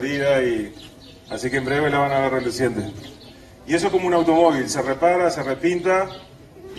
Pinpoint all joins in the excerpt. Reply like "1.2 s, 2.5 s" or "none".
none